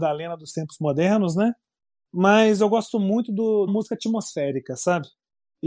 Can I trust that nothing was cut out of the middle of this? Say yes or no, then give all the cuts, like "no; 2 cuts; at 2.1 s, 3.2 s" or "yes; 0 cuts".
no; 1 cut; at 3.7 s